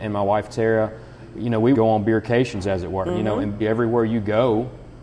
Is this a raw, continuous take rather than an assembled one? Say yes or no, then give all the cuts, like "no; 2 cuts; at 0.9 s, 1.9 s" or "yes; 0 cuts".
no; 2 cuts; at 1.7 s, 3.6 s